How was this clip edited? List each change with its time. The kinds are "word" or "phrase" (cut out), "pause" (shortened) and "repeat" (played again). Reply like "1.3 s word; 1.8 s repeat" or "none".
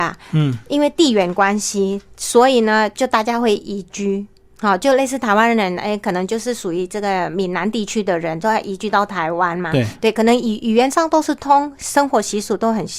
none